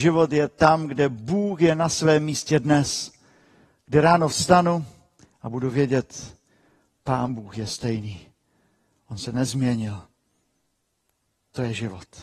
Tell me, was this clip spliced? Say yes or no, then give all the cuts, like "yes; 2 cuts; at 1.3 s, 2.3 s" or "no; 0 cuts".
no; 0 cuts